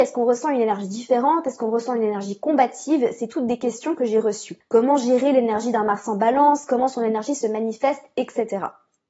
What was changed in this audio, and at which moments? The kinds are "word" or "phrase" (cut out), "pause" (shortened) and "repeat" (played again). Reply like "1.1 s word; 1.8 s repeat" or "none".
4.6 s pause

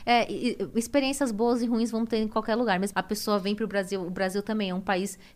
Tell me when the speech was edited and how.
2.9 s word

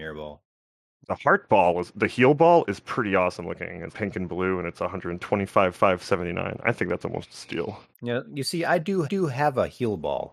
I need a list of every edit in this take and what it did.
3.9 s word; 5.7 s repeat; 7.9 s pause; 9.0 s repeat

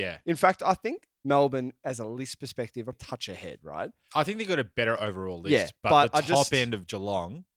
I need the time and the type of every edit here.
2.9 s word

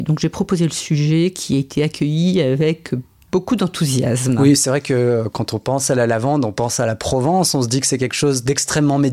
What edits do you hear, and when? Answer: none

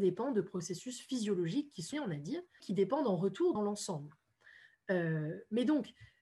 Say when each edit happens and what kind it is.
1.9 s word; 2.6 s word; 3.6 s phrase

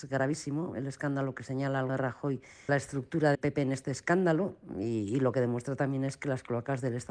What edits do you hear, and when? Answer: 1.9 s word; 2.7 s phrase; 3.3 s word

